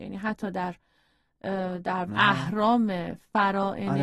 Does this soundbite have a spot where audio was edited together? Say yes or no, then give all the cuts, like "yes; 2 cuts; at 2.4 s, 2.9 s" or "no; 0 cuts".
yes; 1 cut; at 2.1 s